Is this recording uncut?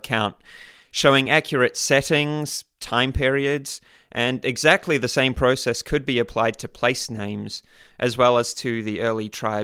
yes; 0 cuts

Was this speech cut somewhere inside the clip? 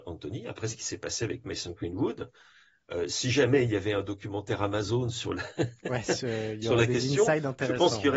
no; 0 cuts

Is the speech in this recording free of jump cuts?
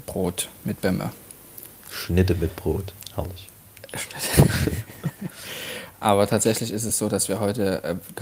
yes; 0 cuts

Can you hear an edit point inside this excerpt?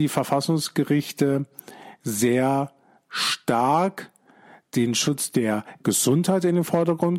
no; 0 cuts

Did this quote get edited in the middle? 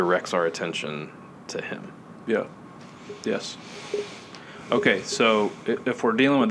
no; 0 cuts

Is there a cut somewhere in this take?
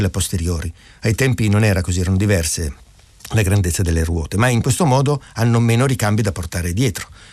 no; 0 cuts

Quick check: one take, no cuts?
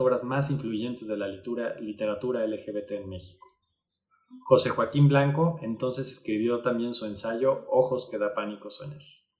yes; 0 cuts

